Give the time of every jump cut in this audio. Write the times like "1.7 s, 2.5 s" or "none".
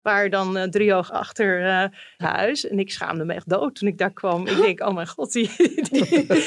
2.2 s